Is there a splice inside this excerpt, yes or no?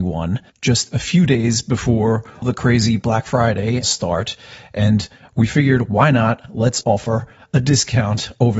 yes